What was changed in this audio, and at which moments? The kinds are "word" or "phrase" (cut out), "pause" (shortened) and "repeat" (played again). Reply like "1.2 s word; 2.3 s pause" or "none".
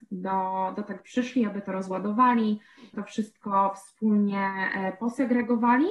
1.0 s word; 2.9 s word